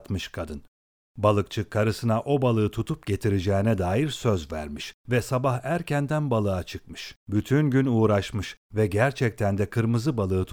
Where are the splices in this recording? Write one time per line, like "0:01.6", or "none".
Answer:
0:05.0
0:07.2

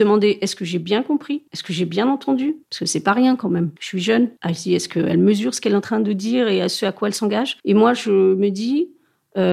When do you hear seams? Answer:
0:01.5
0:02.6
0:03.8
0:04.4
0:07.6

